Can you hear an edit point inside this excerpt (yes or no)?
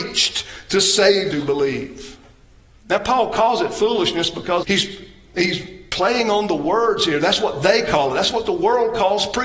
yes